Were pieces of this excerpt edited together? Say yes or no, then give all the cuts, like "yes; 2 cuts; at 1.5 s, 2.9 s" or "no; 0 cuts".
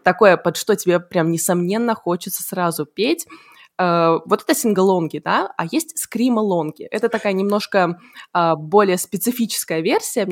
no; 0 cuts